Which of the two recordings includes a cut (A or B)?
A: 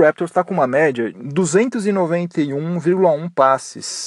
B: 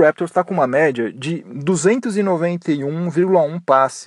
A